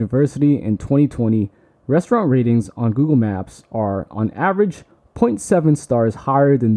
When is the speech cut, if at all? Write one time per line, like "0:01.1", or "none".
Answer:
none